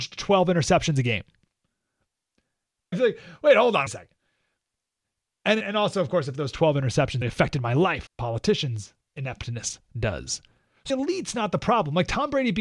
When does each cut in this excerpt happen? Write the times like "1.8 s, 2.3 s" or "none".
2.9 s, 3.9 s, 5.6 s, 7.2 s, 8.1 s, 10.9 s